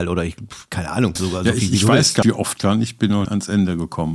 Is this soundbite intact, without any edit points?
no; 4 cuts; at 1.2 s, 2.2 s, 2.6 s, 3.3 s

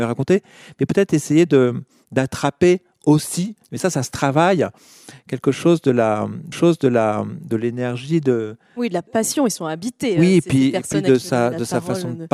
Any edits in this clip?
yes; 2 cuts; at 3.6 s, 6.5 s

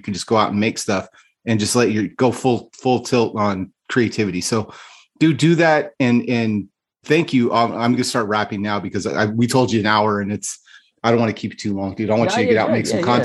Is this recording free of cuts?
yes; 0 cuts

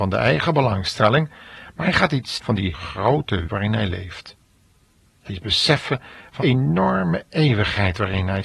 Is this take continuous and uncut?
no; 5 cuts; at 2.3 s, 2.7 s, 3.5 s, 5.3 s, 6.4 s

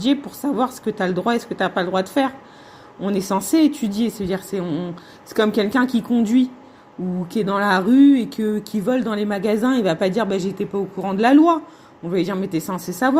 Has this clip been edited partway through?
no; 0 cuts

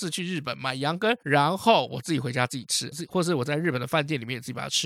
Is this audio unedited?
no; 2 cuts; at 1.2 s, 2.9 s

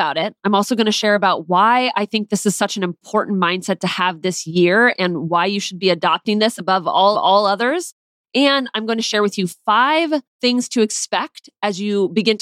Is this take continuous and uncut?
no; 2 cuts; at 7.1 s, 10.3 s

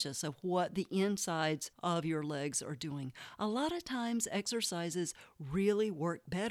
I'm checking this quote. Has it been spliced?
no; 0 cuts

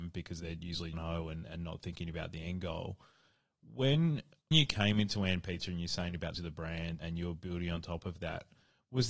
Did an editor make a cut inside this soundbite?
yes; 4 cuts; at 0.9 s, 4.5 s, 6.3 s, 7.0 s

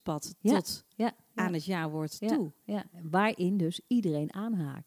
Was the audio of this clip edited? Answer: no; 0 cuts

